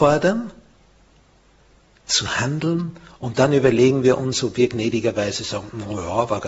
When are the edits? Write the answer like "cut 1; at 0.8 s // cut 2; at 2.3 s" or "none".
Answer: none